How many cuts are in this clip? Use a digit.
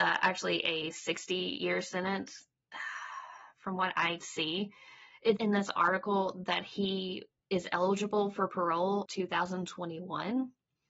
3